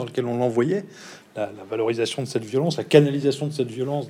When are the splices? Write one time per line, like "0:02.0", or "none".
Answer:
none